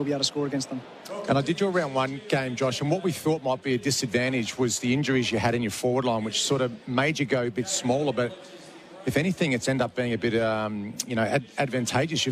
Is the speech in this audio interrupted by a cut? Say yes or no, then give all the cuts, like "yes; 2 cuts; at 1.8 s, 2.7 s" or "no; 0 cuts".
no; 0 cuts